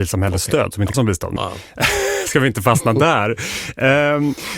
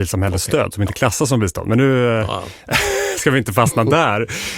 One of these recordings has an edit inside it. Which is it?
first; 2 cuts; at 0.9 s, 1.4 s

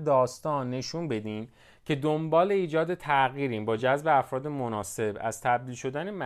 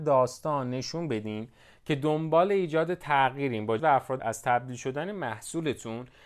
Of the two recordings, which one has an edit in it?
second; 2 cuts; at 3.8 s, 4.2 s

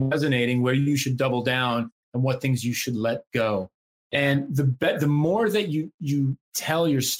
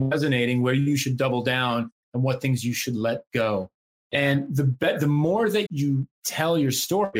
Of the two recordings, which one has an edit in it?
second; 1 cut; at 5.7 s

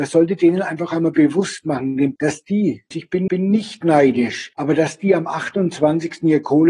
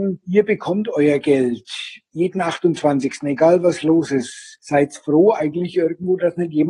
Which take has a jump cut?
first; 3 cuts; at 2.2 s, 2.9 s, 3.3 s

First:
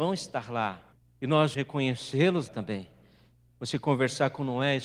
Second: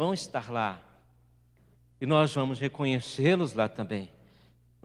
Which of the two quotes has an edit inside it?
first; 3 cuts; at 0.9 s, 1.5 s, 2.5 s

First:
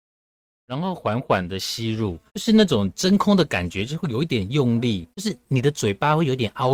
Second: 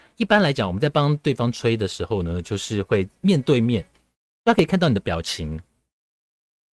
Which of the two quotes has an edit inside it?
first; 2 cuts; at 2.3 s, 5.1 s

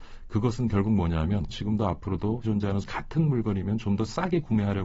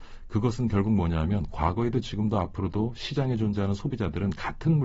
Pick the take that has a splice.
first; 3 cuts; at 1.5 s, 2.4 s, 2.8 s

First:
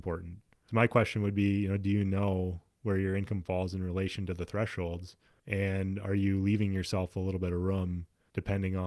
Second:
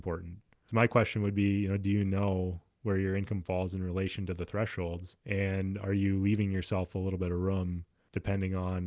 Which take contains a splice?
second; 1 cut; at 5.2 s

